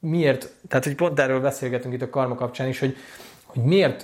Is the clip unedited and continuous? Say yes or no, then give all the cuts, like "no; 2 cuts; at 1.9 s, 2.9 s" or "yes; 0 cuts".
yes; 0 cuts